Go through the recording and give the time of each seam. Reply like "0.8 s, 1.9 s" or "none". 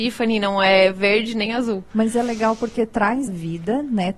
3.3 s